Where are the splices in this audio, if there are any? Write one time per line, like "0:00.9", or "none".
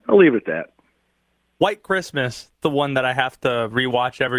0:02.6